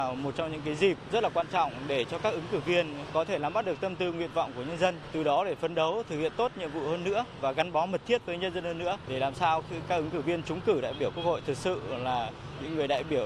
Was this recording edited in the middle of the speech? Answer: no; 0 cuts

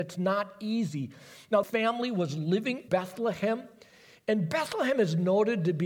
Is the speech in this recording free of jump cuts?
no; 2 cuts; at 1.6 s, 2.9 s

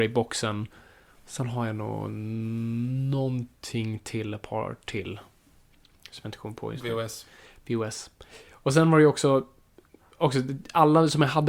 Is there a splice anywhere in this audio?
no; 0 cuts

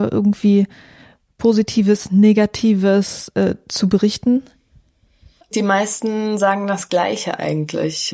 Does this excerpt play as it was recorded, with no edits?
yes; 0 cuts

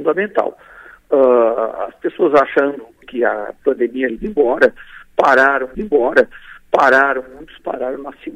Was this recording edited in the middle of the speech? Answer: yes; 3 cuts; at 3.0 s, 4.1 s, 5.7 s

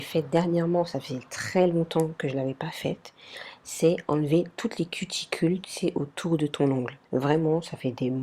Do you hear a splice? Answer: yes; 1 cut; at 7.1 s

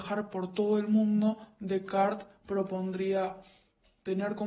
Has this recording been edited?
no; 0 cuts

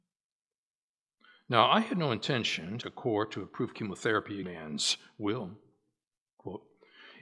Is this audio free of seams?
no; 2 cuts; at 2.8 s, 4.4 s

